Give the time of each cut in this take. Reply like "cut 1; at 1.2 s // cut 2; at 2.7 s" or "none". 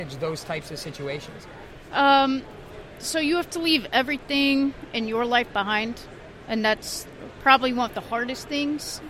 none

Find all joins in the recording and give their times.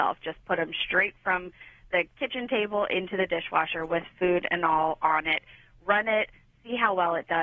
none

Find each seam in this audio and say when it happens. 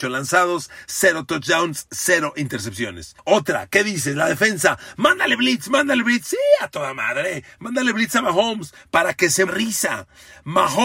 cut 1; at 3.2 s // cut 2; at 9.5 s

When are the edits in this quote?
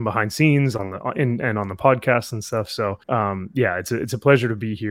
cut 1; at 3.0 s

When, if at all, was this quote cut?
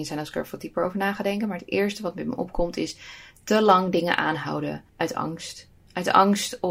cut 1; at 4.9 s

